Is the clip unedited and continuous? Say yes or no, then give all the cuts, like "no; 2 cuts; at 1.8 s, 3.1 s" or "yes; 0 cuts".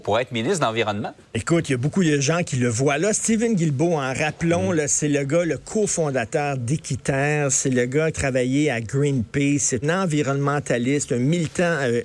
no; 2 cuts; at 8.1 s, 9.8 s